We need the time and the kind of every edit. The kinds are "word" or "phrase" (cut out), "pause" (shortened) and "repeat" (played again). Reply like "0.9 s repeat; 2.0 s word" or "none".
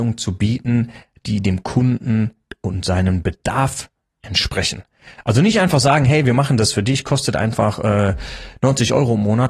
none